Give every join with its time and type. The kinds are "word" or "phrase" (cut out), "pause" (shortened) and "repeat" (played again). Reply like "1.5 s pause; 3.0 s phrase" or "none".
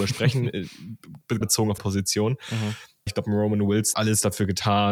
1.4 s word; 1.8 s word; 3.1 s word; 3.9 s word